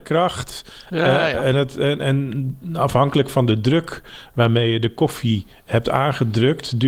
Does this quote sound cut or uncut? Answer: uncut